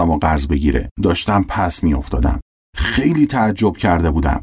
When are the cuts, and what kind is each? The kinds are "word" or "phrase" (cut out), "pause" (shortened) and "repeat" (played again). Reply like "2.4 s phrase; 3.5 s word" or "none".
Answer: 0.9 s pause